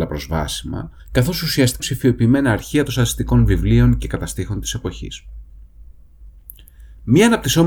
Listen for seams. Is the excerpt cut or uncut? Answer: cut